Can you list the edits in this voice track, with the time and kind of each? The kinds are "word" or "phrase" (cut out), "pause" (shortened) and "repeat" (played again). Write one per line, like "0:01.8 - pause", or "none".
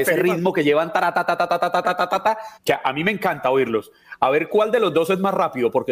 0:02.5 - pause